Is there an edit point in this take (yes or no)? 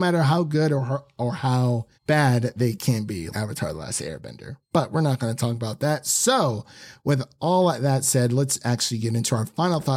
yes